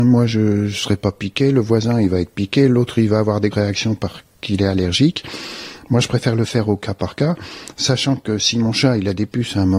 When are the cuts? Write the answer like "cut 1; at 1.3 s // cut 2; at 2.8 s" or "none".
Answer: cut 1; at 3.5 s